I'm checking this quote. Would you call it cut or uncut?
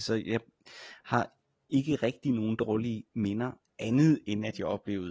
uncut